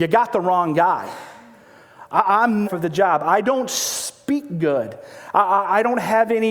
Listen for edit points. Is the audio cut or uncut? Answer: cut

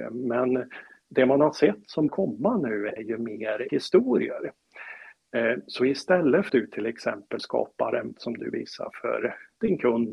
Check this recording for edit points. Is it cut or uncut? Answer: cut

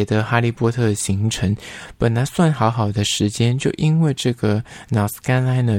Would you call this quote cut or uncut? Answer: uncut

